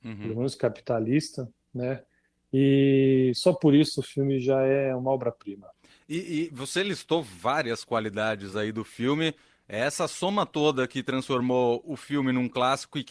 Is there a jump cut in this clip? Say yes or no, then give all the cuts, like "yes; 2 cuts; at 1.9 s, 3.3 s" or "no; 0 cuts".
no; 0 cuts